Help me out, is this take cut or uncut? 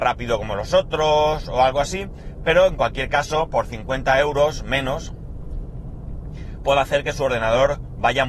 uncut